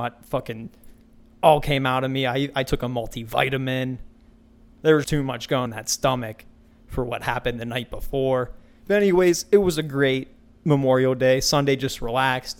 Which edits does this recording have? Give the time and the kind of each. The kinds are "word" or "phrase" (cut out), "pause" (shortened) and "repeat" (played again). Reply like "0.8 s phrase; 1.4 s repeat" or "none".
5.0 s word; 5.7 s word